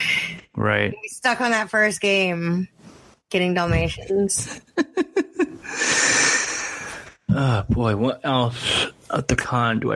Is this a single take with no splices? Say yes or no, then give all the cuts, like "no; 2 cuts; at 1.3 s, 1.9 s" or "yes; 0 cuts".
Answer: yes; 0 cuts